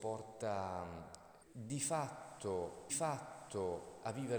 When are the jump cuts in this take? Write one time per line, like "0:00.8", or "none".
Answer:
0:01.4
0:02.9